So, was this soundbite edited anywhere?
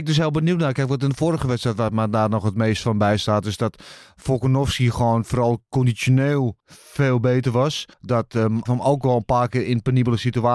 yes; 3 cuts; at 6.6 s, 7.9 s, 8.7 s

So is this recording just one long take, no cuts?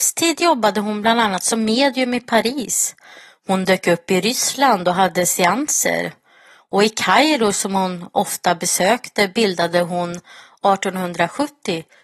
yes; 0 cuts

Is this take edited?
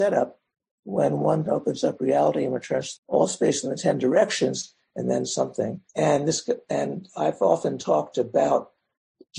yes; 3 cuts; at 1.5 s, 3.0 s, 5.9 s

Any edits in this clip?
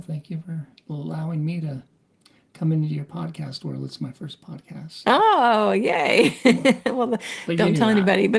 no; 0 cuts

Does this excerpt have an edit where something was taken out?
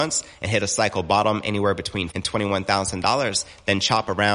yes; 1 cut; at 2.1 s

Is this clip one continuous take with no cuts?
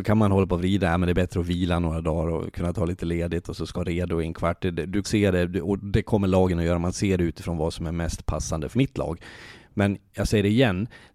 no; 3 cuts; at 3.7 s, 5.0 s, 8.7 s

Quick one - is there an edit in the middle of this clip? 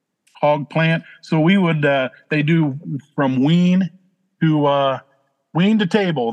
no; 0 cuts

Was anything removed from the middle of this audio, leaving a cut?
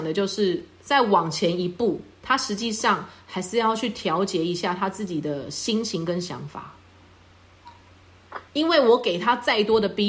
yes; 1 cut; at 8.5 s

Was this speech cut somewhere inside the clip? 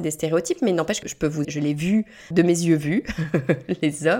yes; 3 cuts; at 1.0 s, 1.4 s, 2.3 s

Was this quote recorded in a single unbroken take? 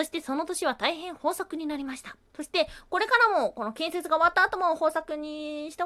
no; 1 cut; at 2.3 s

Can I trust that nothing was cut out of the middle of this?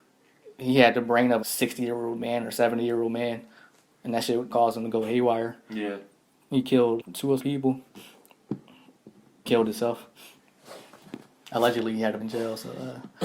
no; 6 cuts; at 1.4 s, 4.5 s, 7.0 s, 7.4 s, 9.4 s, 12.2 s

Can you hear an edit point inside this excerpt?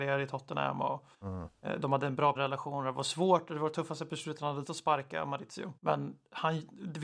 yes; 4 cuts; at 1.1 s, 2.4 s, 4.7 s, 5.8 s

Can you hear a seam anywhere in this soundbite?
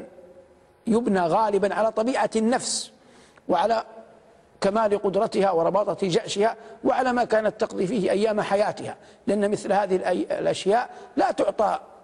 no; 0 cuts

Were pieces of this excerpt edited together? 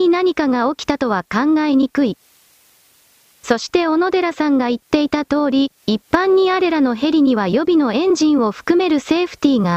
no; 0 cuts

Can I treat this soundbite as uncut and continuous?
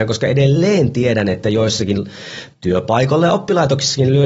no; 1 cut; at 2.5 s

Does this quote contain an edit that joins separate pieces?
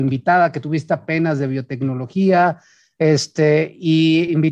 no; 0 cuts

